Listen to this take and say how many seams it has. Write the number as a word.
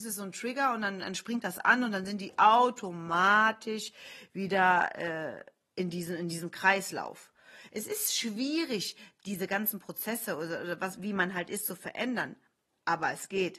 zero